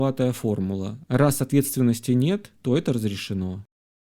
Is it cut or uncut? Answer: cut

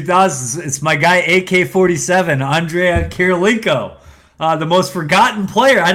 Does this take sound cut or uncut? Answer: uncut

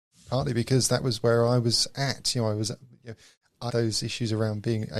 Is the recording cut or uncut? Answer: cut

